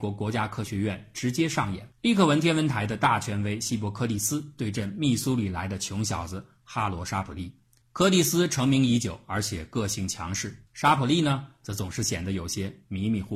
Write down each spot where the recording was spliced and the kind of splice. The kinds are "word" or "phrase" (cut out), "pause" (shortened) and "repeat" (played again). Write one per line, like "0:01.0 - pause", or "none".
0:01.9 - pause
0:07.8 - pause
0:10.7 - pause

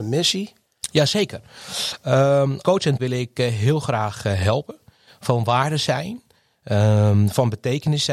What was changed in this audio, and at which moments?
0:02.6 - word
0:03.0 - word

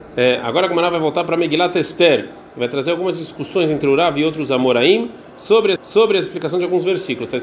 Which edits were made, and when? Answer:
0:05.8 - repeat

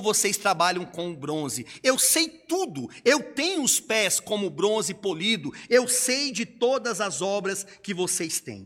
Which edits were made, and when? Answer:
none

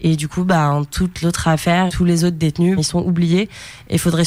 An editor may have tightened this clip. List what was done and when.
0:01.2 - word
0:01.9 - word
0:02.8 - word

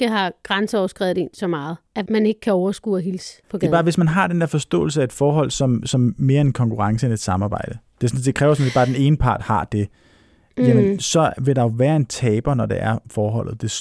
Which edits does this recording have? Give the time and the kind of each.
none

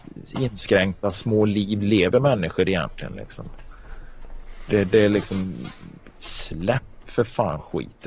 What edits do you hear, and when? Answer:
none

